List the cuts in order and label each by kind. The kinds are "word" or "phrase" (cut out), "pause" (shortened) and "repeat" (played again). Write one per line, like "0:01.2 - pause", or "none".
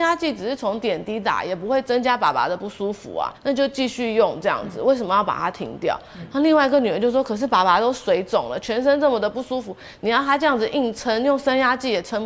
0:03.4 - pause